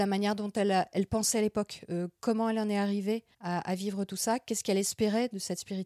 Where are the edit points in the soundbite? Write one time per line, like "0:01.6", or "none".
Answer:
0:03.3